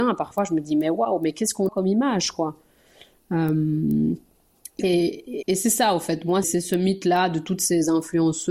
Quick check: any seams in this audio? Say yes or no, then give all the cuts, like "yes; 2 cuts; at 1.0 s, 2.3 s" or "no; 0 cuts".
yes; 3 cuts; at 1.7 s, 5.4 s, 6.4 s